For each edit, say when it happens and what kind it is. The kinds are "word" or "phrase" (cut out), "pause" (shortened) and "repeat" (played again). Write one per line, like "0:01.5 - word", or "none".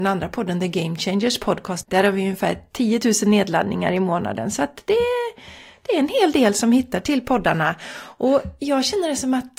none